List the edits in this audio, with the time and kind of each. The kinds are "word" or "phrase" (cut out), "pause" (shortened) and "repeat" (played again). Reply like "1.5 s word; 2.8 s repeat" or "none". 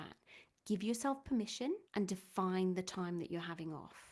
1.9 s pause